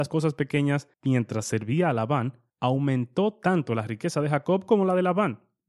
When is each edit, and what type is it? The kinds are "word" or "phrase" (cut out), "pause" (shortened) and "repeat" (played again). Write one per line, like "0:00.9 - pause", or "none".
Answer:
0:00.9 - pause
0:02.5 - pause

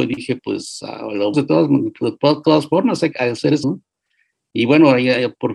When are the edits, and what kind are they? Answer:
0:01.3 - word
0:03.1 - word
0:03.6 - word

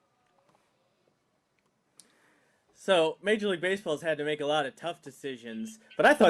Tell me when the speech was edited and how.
none

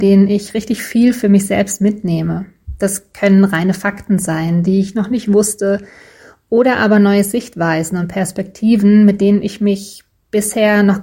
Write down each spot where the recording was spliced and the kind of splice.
none

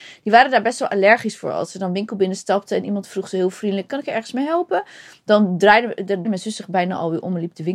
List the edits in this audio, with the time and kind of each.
0:06.2 - word

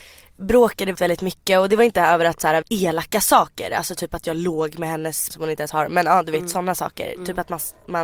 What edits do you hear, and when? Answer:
0:00.9 - word
0:02.6 - phrase
0:05.3 - word

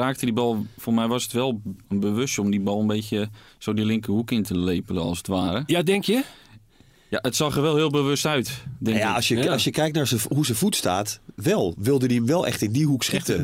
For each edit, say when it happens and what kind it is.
0:01.8 - pause
0:03.5 - pause

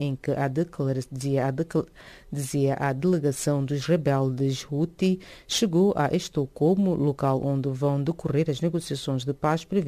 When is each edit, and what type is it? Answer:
none

